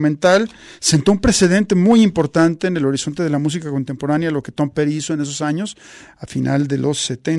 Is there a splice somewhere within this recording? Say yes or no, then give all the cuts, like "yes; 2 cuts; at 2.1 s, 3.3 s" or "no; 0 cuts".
no; 0 cuts